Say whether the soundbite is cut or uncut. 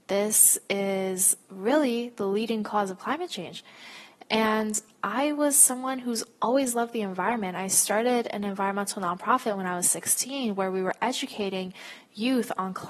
uncut